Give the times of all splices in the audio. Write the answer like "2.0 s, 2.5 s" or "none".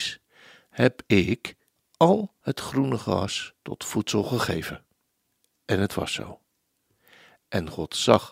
1.8 s, 3.6 s, 5.1 s